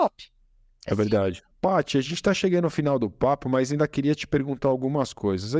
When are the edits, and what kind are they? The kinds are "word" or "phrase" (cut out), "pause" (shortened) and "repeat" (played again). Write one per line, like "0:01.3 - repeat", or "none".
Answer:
0:01.5 - pause

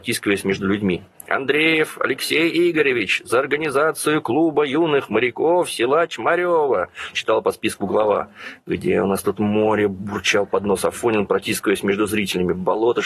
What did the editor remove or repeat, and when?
0:07.1 - word

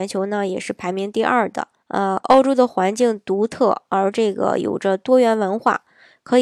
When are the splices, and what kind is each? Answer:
0:01.7 - pause

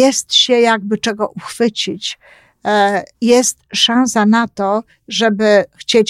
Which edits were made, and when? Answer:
0:03.1 - pause

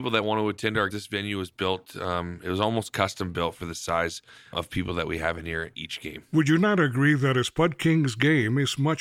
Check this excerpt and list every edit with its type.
0:00.9 - word
0:04.5 - word

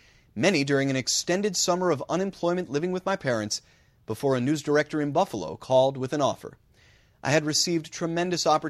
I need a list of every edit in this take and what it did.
none

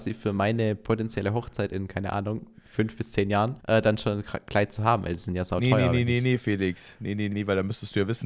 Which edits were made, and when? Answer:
0:03.6 - pause
0:07.3 - word

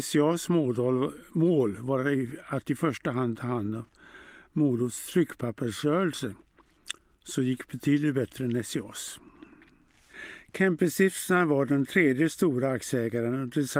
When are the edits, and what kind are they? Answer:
none

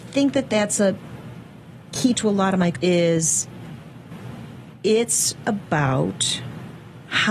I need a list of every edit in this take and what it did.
0:02.1 - word
0:02.7 - word
0:05.4 - word

